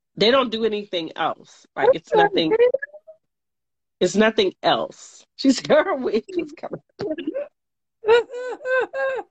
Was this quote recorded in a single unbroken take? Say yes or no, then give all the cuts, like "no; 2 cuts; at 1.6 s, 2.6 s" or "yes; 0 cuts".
yes; 0 cuts